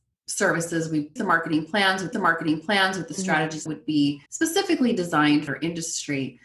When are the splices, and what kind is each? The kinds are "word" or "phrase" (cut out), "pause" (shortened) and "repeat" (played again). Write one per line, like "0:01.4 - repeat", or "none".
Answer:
0:01.2 - phrase
0:02.1 - repeat
0:03.7 - phrase
0:04.3 - pause
0:05.5 - phrase